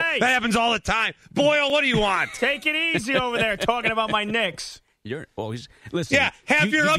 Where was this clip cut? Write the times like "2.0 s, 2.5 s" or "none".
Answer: none